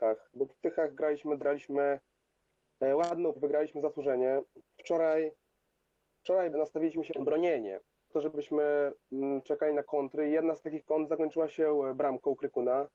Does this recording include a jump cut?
yes; 5 cuts; at 1.4 s, 3.4 s, 6.5 s, 7.1 s, 8.1 s

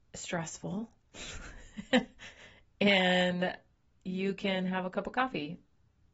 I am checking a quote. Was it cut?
no; 0 cuts

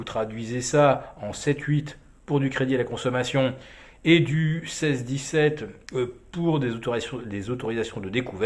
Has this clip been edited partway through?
no; 0 cuts

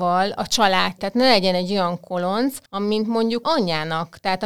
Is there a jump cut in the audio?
yes; 3 cuts; at 1.0 s, 2.7 s, 3.4 s

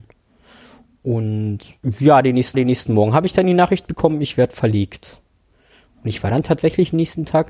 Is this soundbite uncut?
no; 1 cut; at 2.5 s

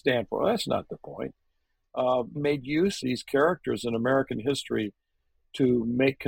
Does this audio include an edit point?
yes; 2 cuts; at 2.3 s, 3.0 s

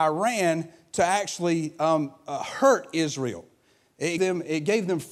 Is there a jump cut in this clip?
yes; 1 cut; at 4.2 s

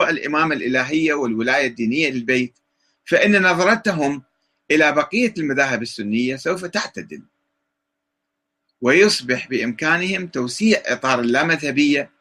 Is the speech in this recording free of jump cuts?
no; 1 cut; at 2.1 s

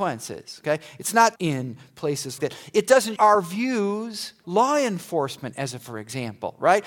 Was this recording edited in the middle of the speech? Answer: yes; 4 cuts; at 1.4 s, 2.4 s, 3.2 s, 4.4 s

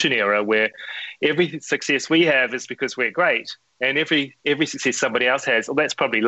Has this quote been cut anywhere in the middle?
yes; 1 cut; at 4.4 s

